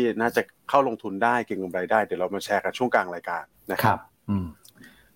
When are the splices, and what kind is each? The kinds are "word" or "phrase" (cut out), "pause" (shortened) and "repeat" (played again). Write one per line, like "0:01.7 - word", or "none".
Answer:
0:03.5 - pause
0:04.1 - pause